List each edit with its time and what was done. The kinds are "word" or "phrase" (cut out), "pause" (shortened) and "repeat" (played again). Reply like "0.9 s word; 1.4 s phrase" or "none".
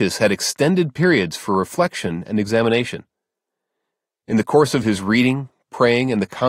none